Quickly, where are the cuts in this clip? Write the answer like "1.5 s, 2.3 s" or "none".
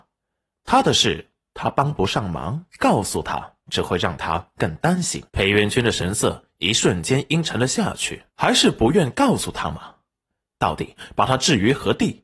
2.7 s, 3.6 s, 5.3 s, 8.3 s